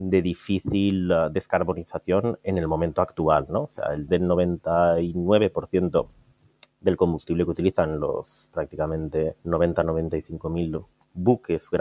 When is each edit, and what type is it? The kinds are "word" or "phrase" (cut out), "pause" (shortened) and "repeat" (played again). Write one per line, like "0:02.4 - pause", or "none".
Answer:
0:04.1 - word
0:06.7 - pause
0:09.4 - pause